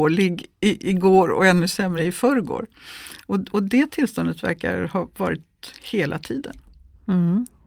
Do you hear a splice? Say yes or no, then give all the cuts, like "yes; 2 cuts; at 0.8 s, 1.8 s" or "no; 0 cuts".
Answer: no; 0 cuts